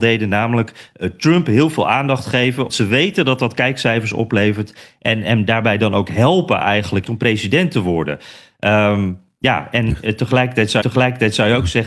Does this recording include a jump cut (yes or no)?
yes